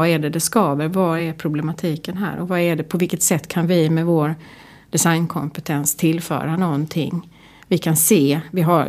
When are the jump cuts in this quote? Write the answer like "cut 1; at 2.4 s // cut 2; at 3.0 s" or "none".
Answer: none